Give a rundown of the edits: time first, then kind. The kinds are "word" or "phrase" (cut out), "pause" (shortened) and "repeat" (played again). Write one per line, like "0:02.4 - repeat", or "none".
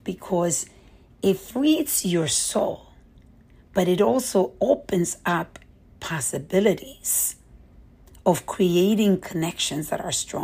none